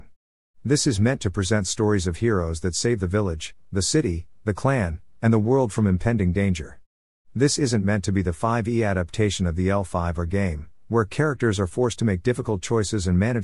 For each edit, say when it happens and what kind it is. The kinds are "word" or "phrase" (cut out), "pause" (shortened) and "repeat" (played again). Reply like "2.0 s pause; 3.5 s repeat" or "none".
none